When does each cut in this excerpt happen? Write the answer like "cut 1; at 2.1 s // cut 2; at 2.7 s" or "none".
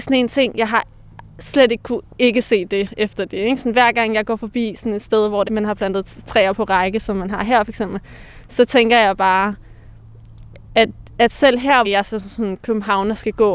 cut 1; at 1.3 s // cut 2; at 5.5 s // cut 3; at 11.8 s